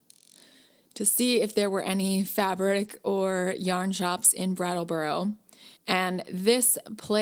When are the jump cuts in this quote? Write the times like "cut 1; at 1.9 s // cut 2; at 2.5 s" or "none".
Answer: cut 1; at 5.8 s